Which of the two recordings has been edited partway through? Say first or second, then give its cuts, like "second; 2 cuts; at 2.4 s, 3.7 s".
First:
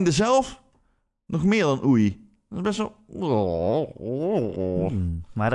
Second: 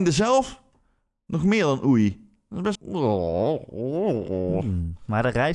second; 1 cut; at 2.7 s